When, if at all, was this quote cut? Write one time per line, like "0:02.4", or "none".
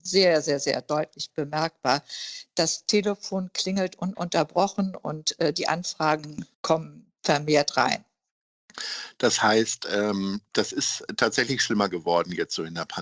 0:06.5